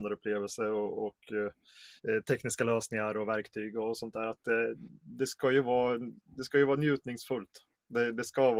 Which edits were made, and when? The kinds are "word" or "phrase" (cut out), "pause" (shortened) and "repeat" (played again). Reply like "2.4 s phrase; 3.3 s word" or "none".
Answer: 2.0 s pause